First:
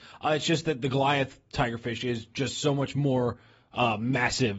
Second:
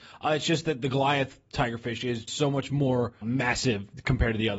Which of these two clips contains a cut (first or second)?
second